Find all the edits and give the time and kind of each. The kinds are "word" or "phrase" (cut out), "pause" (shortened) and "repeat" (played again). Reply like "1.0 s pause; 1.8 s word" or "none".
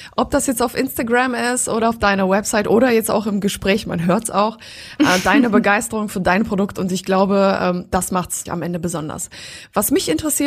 8.5 s word